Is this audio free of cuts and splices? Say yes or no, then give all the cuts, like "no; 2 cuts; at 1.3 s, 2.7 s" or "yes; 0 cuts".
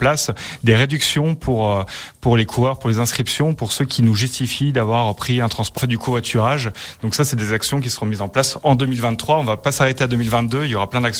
no; 1 cut; at 5.8 s